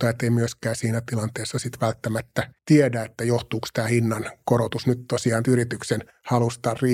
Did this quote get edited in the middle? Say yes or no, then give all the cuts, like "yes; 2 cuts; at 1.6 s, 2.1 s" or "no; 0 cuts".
yes; 2 cuts; at 2.6 s, 5.4 s